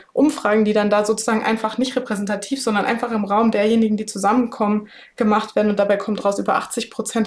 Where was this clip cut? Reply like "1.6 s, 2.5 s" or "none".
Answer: none